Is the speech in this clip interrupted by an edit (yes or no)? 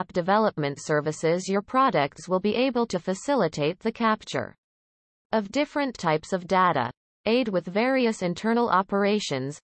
no